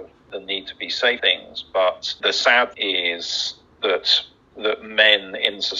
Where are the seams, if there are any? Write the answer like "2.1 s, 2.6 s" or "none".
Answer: 1.2 s, 2.2 s, 2.7 s, 3.8 s